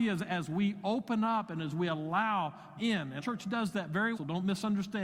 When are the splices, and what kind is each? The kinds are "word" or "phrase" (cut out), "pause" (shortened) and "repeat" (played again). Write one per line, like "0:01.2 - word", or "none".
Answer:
0:02.8 - word
0:03.2 - word
0:04.1 - word